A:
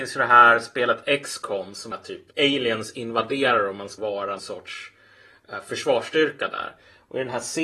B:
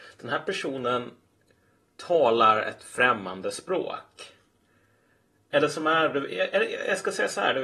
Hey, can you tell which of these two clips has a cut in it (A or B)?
A